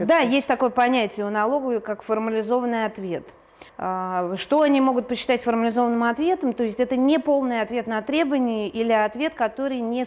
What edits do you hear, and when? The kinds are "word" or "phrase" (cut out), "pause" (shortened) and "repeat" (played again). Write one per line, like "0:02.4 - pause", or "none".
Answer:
0:03.7 - pause